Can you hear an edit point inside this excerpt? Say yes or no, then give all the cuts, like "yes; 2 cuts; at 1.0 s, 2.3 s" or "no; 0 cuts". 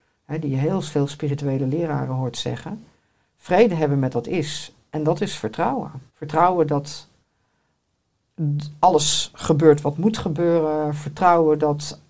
yes; 2 cuts; at 4.1 s, 6.1 s